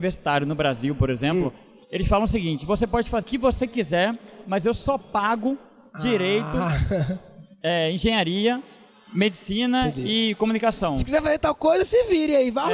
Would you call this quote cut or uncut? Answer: cut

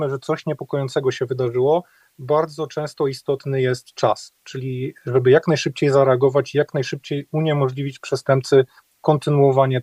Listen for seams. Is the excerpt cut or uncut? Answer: uncut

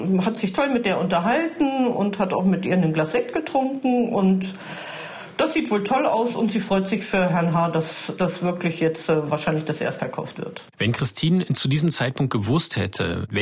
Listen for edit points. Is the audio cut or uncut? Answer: cut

